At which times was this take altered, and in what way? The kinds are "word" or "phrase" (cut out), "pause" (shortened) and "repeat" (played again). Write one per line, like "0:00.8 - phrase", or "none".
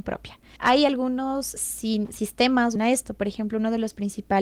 0:01.6 - word
0:02.8 - phrase